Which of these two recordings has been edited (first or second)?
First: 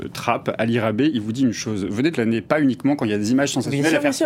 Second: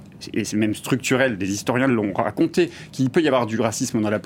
first